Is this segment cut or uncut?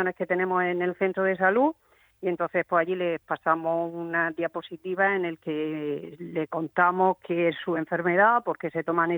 uncut